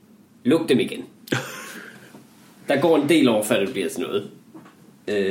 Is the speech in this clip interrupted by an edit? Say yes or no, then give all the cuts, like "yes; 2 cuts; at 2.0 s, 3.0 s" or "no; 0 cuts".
no; 0 cuts